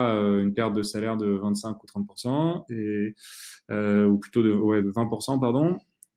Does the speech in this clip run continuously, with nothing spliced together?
no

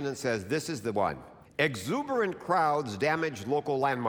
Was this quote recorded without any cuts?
no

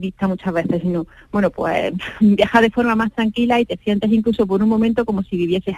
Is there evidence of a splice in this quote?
no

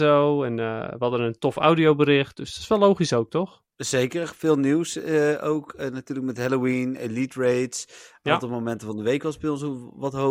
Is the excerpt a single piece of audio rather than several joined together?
no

